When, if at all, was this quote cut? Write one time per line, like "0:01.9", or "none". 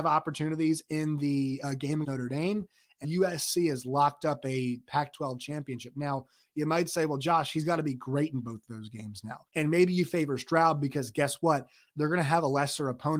0:02.0
0:03.0
0:09.5